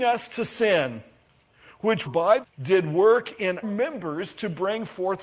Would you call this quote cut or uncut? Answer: cut